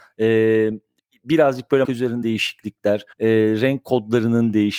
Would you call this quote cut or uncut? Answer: cut